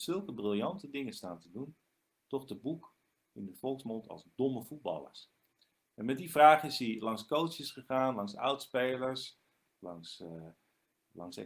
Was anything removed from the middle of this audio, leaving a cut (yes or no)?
no